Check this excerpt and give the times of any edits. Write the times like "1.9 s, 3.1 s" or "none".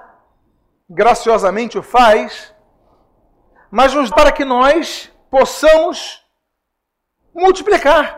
4.1 s